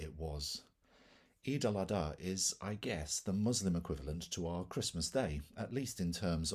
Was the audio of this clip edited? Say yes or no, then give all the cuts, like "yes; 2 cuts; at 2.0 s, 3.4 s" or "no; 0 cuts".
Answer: no; 0 cuts